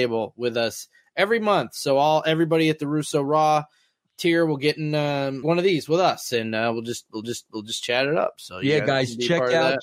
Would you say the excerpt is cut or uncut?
cut